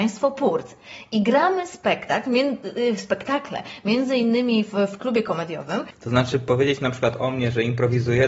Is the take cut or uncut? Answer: uncut